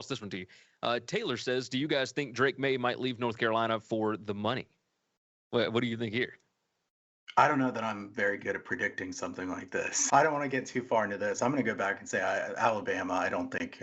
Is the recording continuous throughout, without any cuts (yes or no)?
no